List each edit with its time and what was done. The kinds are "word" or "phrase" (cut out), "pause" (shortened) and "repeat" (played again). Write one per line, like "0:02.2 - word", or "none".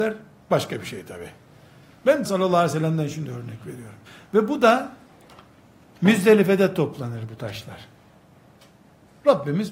0:02.2 - word
0:04.1 - pause